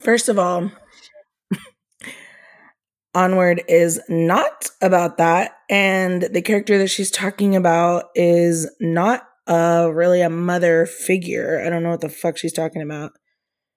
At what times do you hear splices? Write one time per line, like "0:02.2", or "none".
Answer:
none